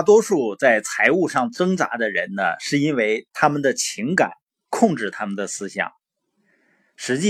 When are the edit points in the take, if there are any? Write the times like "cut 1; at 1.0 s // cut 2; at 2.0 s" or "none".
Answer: none